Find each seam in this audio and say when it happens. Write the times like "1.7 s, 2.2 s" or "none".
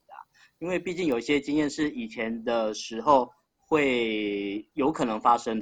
4.7 s